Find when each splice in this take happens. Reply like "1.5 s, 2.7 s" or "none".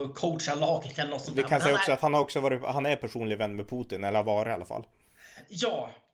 none